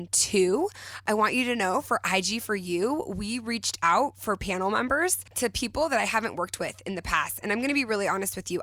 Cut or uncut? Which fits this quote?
uncut